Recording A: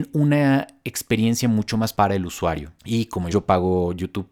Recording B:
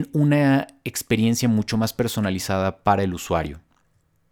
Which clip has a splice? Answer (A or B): A